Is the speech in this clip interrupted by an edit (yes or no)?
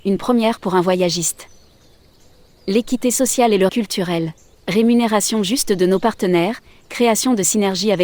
yes